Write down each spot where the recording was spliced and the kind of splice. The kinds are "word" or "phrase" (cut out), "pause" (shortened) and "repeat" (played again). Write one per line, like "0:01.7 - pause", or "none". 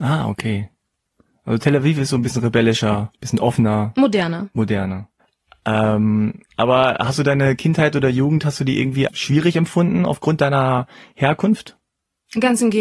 0:03.1 - pause
0:05.2 - pause
0:09.1 - word